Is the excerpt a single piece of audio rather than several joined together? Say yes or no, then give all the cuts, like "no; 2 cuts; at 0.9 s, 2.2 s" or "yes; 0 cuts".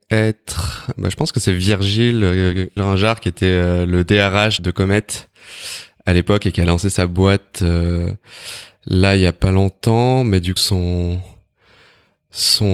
no; 4 cuts; at 1.0 s, 2.8 s, 4.6 s, 10.6 s